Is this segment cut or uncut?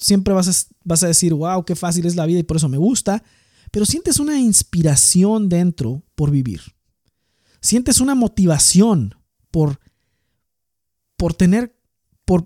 uncut